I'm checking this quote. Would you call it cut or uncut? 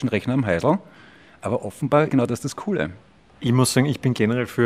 cut